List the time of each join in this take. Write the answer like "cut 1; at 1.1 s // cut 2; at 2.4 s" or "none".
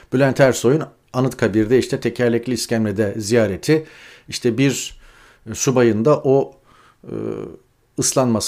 none